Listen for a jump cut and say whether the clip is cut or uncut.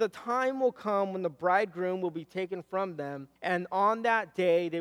cut